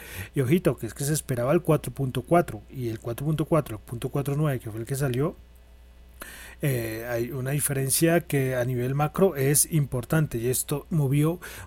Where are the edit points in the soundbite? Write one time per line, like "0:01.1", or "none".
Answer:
none